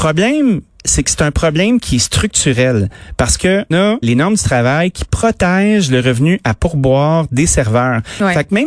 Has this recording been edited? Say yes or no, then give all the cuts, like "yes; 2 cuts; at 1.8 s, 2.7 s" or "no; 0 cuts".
yes; 2 cuts; at 3.7 s, 4.0 s